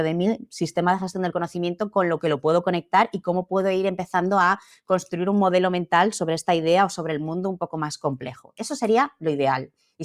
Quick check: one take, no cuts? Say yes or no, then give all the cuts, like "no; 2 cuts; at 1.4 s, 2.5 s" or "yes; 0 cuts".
yes; 0 cuts